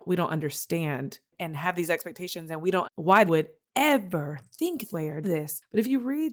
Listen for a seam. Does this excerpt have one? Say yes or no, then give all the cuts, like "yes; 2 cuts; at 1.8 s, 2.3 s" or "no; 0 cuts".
yes; 4 cuts; at 2.8 s, 3.3 s, 4.9 s, 5.2 s